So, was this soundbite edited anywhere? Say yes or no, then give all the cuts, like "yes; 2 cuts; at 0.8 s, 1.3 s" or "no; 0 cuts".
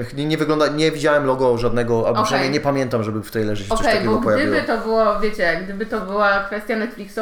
no; 0 cuts